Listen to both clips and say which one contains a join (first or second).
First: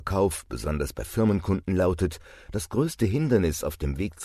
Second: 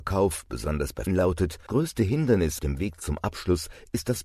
second